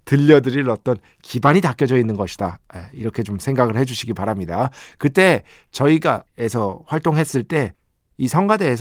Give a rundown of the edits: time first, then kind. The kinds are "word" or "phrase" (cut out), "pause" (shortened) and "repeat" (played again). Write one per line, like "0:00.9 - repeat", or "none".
0:06.3 - phrase